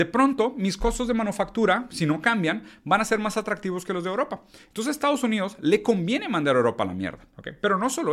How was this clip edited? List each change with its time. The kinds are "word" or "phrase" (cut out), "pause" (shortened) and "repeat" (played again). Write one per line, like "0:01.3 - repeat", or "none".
none